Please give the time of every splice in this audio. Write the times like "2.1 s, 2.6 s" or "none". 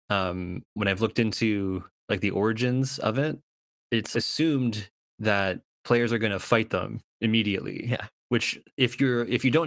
4.1 s, 7.1 s, 8.2 s